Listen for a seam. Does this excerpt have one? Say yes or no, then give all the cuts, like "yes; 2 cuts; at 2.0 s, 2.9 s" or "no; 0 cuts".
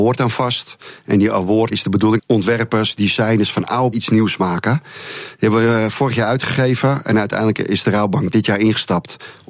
yes; 3 cuts; at 1.7 s, 2.2 s, 3.9 s